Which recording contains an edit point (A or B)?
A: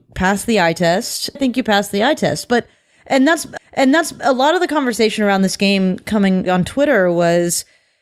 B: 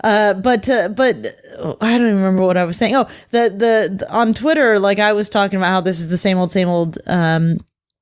A